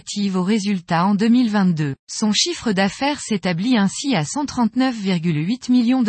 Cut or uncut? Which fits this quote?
cut